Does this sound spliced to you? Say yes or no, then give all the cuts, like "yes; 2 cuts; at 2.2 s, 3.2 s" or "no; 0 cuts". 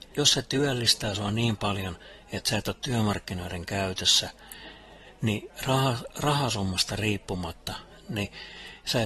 no; 0 cuts